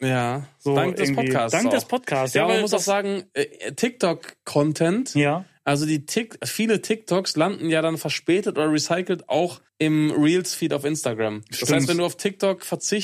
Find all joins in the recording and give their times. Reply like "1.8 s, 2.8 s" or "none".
9.7 s

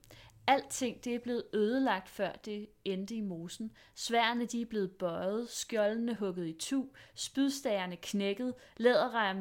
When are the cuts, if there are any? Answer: none

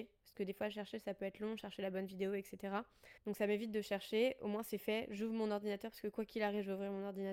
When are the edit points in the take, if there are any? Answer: 3.2 s

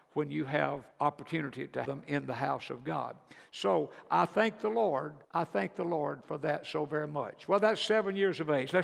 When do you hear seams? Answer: 0.9 s, 1.9 s, 5.2 s

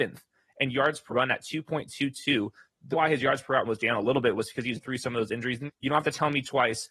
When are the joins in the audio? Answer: 1.1 s, 2.9 s, 3.7 s, 4.8 s, 5.7 s

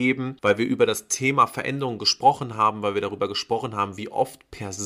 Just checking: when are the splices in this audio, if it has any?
none

